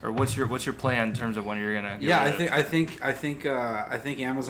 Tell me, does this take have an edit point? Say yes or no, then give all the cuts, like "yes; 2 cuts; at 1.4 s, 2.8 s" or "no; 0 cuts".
no; 0 cuts